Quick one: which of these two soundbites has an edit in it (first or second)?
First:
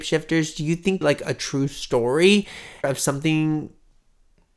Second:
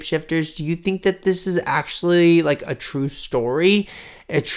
first